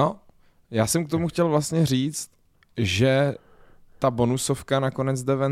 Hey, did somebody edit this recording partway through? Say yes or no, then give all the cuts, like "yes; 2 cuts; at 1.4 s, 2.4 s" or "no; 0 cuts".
no; 0 cuts